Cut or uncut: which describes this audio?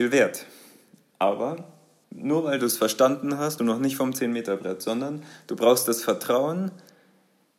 cut